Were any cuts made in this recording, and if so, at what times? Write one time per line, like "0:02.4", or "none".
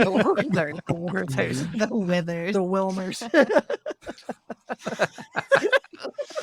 none